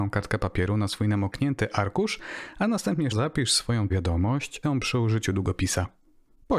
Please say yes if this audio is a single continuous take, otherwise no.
no